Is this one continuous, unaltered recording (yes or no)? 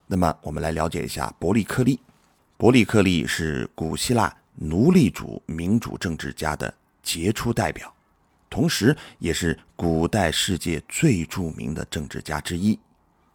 yes